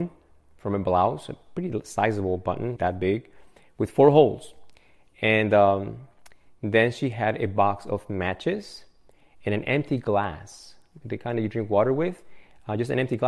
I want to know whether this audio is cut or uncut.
cut